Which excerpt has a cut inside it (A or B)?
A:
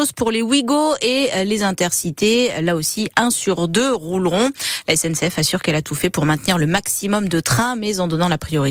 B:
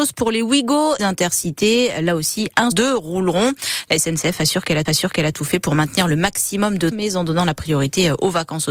B